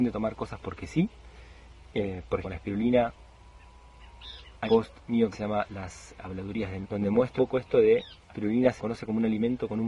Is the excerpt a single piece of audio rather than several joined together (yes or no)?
no